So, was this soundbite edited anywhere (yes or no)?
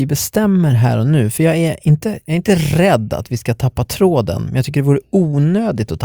no